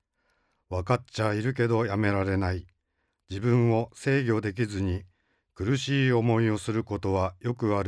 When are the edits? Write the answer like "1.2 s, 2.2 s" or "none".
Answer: none